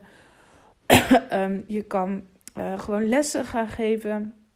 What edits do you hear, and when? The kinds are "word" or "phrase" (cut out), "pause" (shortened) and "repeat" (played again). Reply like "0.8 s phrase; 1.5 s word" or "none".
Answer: none